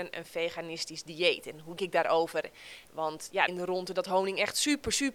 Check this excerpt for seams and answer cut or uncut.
cut